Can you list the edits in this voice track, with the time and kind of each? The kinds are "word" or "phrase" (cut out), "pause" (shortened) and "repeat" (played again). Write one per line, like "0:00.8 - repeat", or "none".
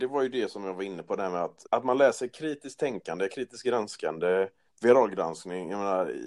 0:01.6 - word
0:04.7 - pause